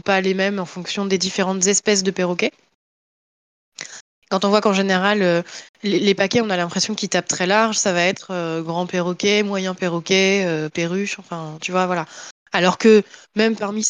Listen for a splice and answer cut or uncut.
uncut